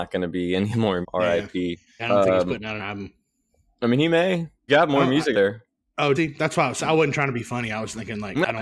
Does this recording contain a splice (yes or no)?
yes